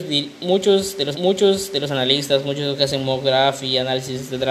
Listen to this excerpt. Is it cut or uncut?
cut